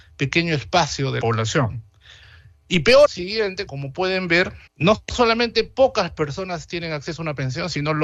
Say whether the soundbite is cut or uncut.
cut